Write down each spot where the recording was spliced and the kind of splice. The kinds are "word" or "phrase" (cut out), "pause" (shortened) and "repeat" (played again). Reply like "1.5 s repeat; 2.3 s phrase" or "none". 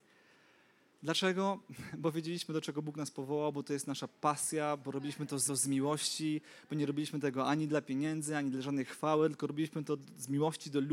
5.5 s repeat